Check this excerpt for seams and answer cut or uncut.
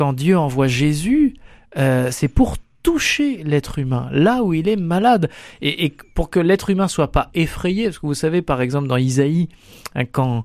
uncut